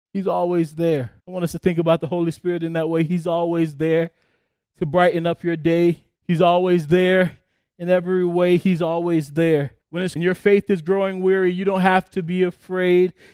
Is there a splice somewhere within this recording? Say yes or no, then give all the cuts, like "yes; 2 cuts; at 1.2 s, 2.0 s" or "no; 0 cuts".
yes; 4 cuts; at 1.2 s, 6.2 s, 9.8 s, 10.2 s